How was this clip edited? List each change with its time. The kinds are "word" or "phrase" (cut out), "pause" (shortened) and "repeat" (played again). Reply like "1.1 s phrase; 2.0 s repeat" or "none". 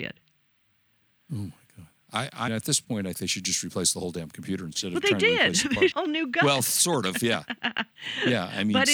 2.5 s word; 3.1 s word; 5.9 s word

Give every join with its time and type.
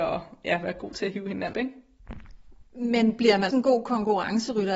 1.5 s word; 2.7 s pause; 3.5 s word

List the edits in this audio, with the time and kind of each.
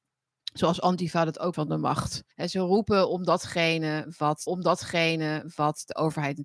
1.5 s word; 2.3 s pause; 4.5 s repeat

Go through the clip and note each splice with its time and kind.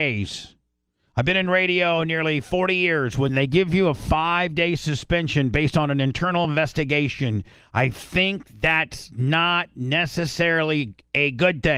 none

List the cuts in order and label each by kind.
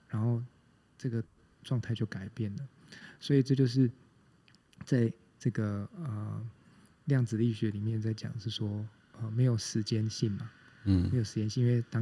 none

